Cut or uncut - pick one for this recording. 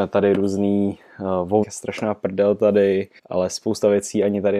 cut